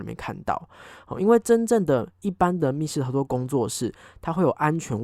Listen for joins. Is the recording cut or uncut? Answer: uncut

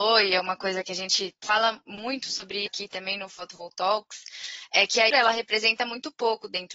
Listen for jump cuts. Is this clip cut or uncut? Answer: cut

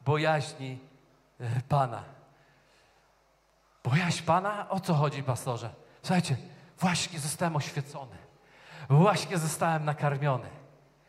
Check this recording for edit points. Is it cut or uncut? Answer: uncut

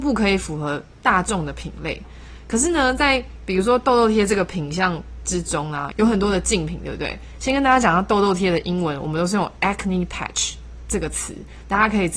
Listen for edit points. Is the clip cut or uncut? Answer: uncut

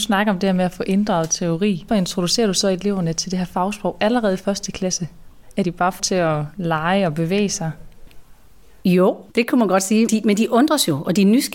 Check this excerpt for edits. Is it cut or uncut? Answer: cut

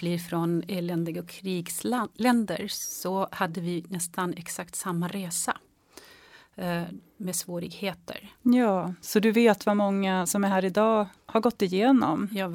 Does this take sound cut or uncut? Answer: uncut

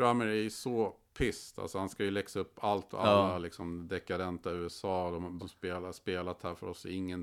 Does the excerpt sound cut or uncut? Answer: cut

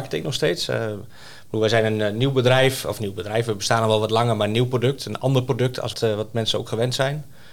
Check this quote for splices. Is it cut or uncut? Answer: cut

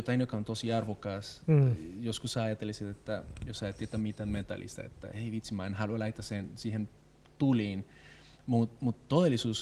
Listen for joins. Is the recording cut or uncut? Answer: uncut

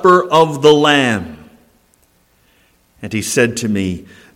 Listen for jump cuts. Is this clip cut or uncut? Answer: uncut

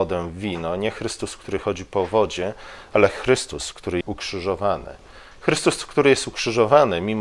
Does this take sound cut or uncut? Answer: cut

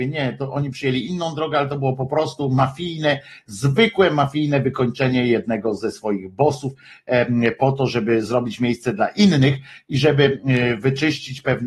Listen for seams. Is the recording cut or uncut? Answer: uncut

